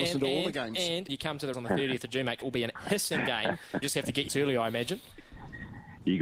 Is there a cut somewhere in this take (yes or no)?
yes